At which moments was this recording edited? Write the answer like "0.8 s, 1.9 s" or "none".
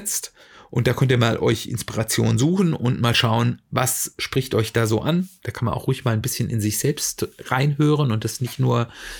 none

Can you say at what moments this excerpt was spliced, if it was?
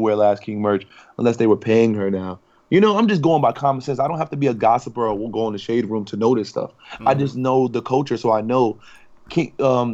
none

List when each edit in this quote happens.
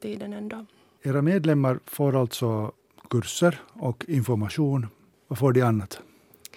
none

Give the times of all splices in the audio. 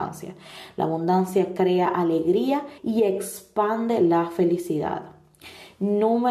2.8 s

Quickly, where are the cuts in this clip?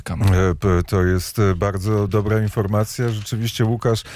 none

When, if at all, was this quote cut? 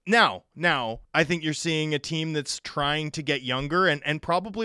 1.0 s

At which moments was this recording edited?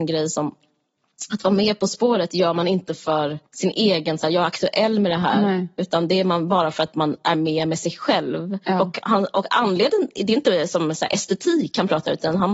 3.5 s, 8.6 s

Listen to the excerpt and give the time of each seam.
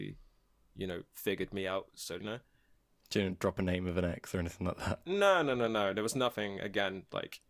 2.2 s

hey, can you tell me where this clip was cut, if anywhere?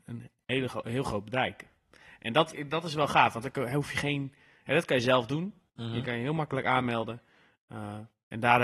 2.5 s

